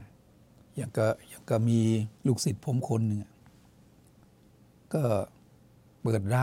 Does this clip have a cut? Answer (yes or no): yes